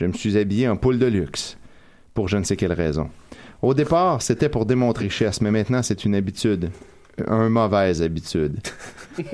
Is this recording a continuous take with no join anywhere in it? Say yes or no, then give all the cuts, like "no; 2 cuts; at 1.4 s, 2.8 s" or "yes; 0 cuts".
no; 1 cut; at 5.0 s